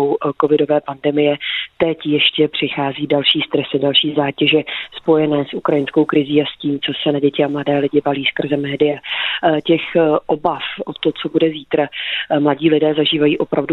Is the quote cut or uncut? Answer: uncut